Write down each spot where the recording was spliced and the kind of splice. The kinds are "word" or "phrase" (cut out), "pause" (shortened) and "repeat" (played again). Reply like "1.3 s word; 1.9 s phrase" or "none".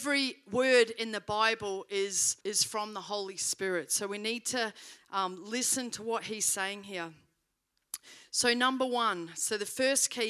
2.4 s pause